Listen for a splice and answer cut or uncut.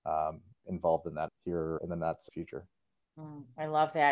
cut